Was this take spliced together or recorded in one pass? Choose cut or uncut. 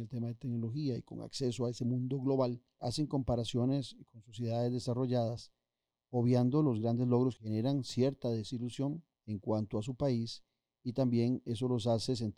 cut